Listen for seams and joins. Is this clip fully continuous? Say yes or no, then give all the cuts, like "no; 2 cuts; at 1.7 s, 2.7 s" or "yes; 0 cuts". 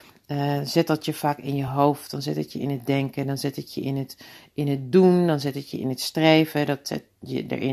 yes; 0 cuts